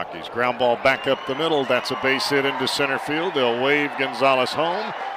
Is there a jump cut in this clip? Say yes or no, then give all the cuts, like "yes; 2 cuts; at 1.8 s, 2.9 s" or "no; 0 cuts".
no; 0 cuts